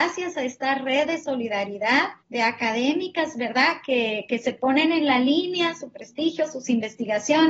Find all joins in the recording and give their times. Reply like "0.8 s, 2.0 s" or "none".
2.2 s